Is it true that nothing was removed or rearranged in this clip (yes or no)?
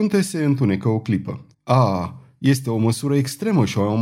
no